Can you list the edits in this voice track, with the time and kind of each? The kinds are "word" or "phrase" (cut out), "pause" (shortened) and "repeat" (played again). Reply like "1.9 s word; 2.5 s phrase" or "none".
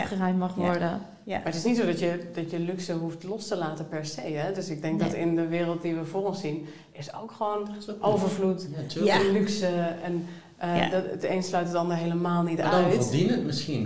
none